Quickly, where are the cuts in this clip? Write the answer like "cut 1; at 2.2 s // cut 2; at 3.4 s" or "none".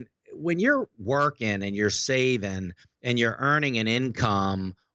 none